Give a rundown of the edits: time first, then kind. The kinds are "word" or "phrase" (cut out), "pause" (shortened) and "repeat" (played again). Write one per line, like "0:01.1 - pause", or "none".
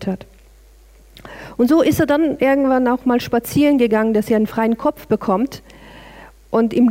none